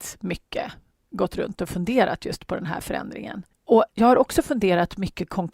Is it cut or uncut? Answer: cut